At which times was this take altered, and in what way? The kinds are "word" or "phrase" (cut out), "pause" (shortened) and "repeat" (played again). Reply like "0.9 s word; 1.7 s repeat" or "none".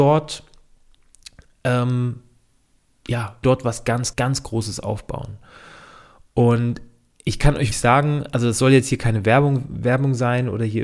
3.4 s word; 4.1 s word; 7.7 s word

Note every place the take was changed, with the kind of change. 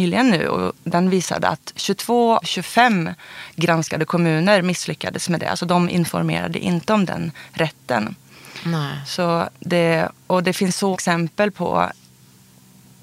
2.4 s word; 10.9 s word

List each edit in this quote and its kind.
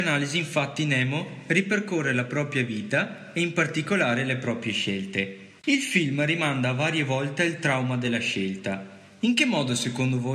5.6 s pause

